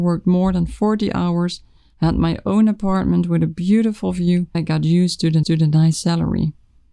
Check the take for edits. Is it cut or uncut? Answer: cut